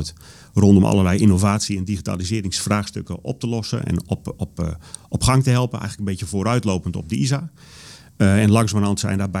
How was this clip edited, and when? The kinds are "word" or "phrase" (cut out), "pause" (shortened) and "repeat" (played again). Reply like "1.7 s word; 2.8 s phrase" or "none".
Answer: none